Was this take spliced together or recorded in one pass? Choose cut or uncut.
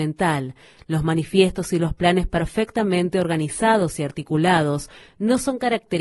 uncut